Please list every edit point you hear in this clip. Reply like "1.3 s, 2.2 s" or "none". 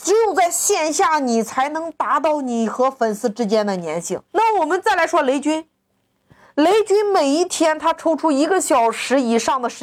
4.3 s